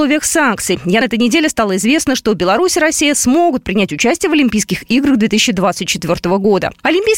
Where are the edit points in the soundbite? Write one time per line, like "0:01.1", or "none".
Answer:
0:01.0